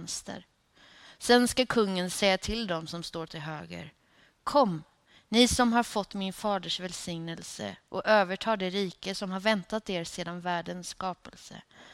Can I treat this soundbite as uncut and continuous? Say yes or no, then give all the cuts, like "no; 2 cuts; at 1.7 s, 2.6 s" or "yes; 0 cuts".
yes; 0 cuts